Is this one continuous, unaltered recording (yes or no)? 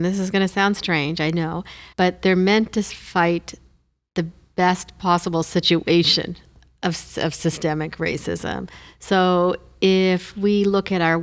no